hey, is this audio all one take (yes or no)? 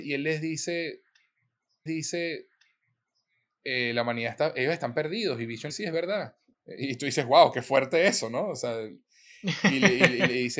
no